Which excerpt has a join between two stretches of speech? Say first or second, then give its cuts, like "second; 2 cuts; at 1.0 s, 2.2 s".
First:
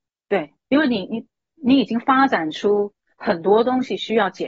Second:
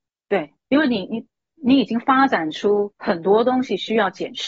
second; 1 cut; at 3.0 s